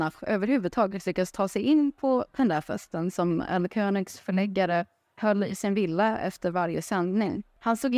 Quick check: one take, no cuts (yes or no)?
yes